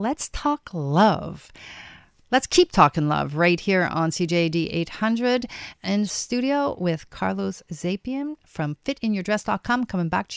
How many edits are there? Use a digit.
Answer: 0